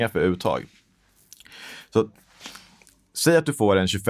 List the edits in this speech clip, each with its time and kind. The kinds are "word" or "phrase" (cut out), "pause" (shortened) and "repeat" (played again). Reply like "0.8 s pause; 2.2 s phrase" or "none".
none

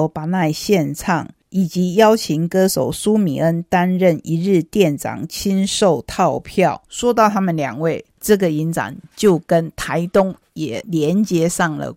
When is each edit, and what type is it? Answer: 6.9 s pause

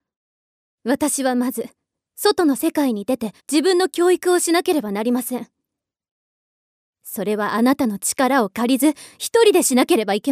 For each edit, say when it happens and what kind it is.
3.4 s pause

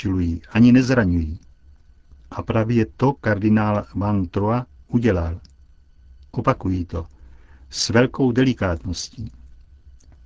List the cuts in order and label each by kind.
none

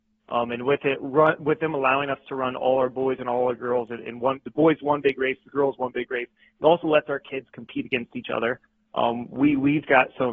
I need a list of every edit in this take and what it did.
none

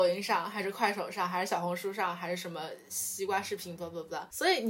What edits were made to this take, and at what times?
none

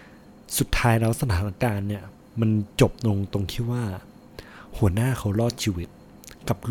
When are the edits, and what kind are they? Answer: none

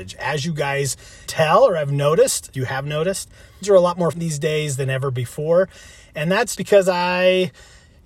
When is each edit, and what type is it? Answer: 1.3 s word; 2.5 s word; 3.6 s word; 4.1 s word; 6.6 s word

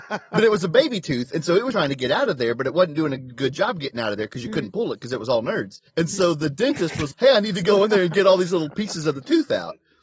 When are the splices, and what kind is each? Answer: 1.7 s word; 5.9 s pause; 7.1 s word

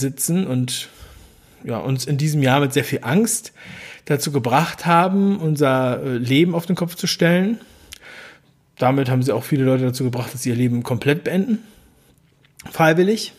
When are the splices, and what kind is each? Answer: none

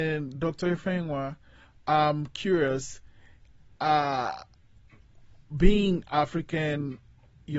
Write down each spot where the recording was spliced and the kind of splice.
none

